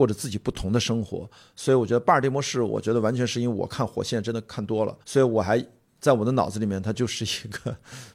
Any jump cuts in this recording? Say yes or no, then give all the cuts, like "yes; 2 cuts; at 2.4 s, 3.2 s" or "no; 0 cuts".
yes; 1 cut; at 5.0 s